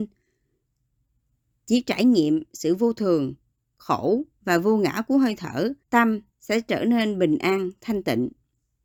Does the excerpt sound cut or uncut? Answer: cut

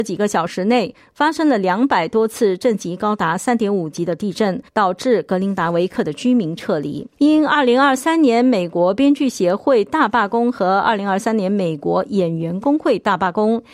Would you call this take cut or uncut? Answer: cut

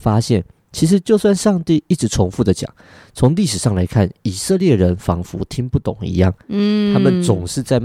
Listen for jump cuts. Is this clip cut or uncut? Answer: uncut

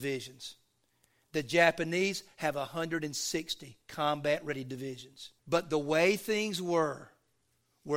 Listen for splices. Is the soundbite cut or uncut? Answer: cut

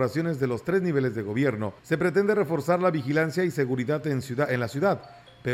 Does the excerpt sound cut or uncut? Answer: cut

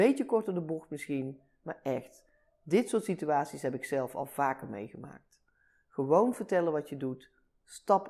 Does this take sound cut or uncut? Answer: uncut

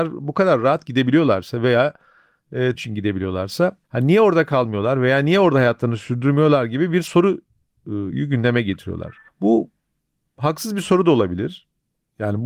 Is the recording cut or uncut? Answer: cut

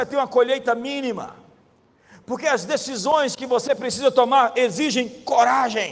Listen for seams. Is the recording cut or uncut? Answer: uncut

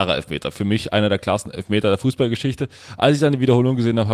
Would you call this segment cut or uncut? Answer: uncut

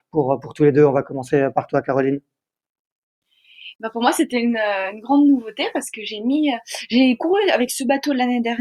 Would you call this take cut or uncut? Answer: uncut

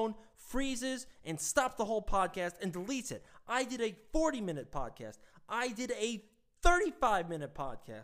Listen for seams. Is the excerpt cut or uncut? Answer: uncut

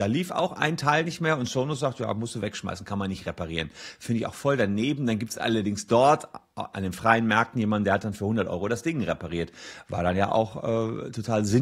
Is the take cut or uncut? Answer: uncut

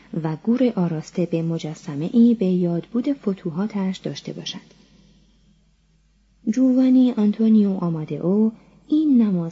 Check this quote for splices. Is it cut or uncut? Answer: uncut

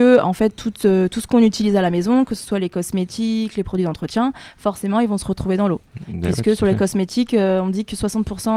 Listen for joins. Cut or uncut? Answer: uncut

